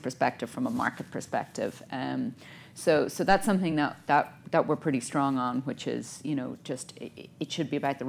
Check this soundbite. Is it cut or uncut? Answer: uncut